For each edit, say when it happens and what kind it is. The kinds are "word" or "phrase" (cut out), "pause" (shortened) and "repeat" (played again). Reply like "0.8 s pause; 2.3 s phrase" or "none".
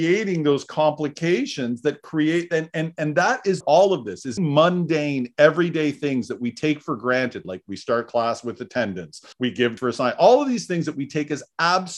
3.6 s phrase; 4.4 s word; 9.3 s pause; 9.8 s word